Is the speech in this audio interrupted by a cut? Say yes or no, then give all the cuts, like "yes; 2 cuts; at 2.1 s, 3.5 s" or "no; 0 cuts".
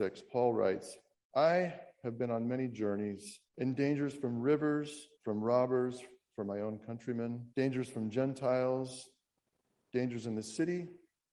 yes; 4 cuts; at 1.1 s, 3.5 s, 5.2 s, 7.5 s